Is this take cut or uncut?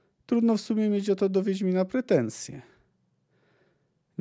uncut